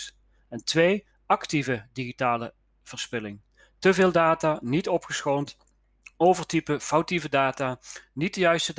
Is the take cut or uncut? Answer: uncut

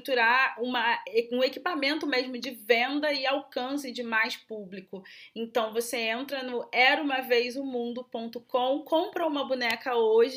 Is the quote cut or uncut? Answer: uncut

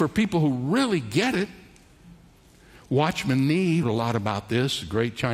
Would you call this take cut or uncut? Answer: cut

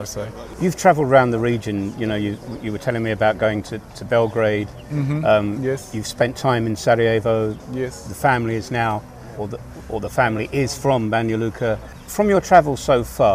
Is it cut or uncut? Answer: cut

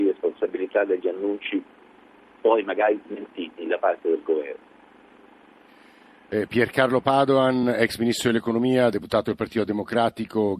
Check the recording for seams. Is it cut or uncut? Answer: uncut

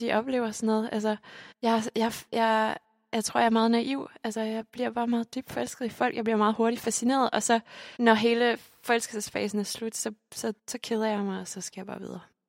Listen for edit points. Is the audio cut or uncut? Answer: cut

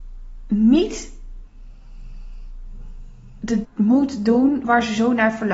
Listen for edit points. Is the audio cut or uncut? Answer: cut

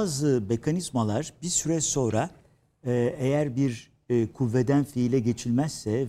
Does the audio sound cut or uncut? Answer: uncut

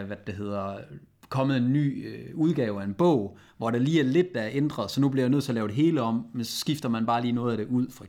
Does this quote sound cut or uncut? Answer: uncut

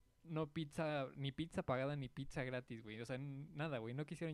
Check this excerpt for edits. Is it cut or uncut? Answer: uncut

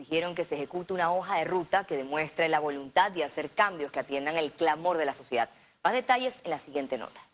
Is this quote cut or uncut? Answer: uncut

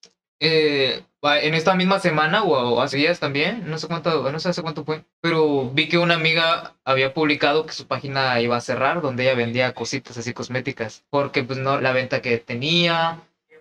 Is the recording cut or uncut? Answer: cut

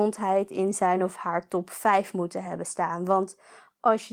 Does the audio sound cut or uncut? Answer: uncut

